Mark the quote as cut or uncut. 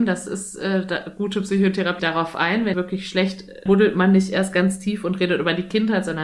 cut